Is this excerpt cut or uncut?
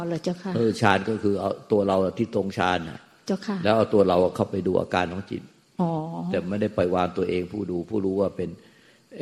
uncut